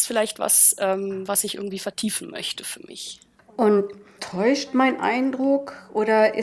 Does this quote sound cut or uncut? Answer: cut